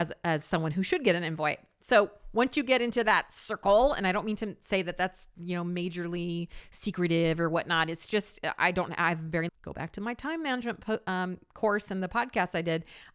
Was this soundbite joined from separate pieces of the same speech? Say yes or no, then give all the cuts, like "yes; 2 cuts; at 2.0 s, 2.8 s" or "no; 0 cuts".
yes; 1 cut; at 9.5 s